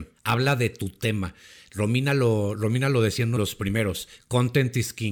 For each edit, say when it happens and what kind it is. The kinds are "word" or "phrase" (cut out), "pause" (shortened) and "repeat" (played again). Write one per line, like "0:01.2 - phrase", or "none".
0:03.4 - word